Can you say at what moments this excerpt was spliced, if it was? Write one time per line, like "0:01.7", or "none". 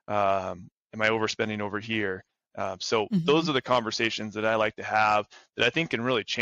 none

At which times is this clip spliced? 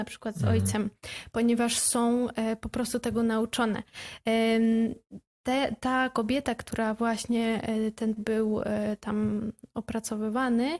0:08.1

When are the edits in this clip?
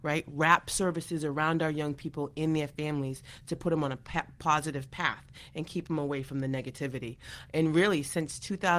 none

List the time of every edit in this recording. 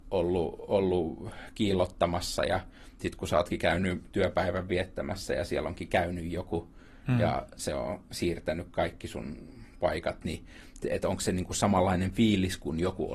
none

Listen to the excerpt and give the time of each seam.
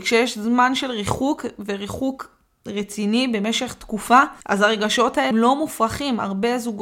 0:04.4
0:05.3

